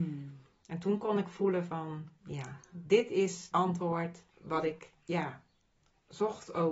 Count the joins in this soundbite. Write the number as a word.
three